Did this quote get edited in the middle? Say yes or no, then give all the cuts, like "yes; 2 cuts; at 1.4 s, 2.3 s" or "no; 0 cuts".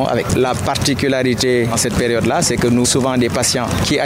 yes; 2 cuts; at 1.7 s, 2.8 s